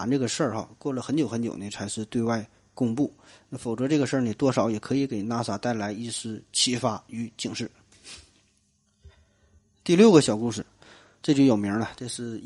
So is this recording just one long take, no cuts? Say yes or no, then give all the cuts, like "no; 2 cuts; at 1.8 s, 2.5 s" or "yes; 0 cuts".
yes; 0 cuts